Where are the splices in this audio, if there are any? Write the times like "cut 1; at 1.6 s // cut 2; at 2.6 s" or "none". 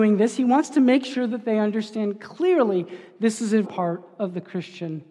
cut 1; at 3.6 s